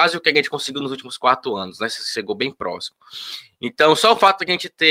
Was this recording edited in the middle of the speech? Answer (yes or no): no